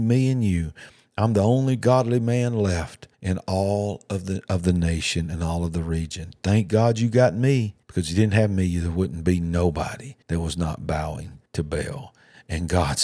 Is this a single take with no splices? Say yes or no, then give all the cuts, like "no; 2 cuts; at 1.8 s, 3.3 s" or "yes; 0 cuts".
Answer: no; 4 cuts; at 3.1 s, 7.8 s, 10.2 s, 11.5 s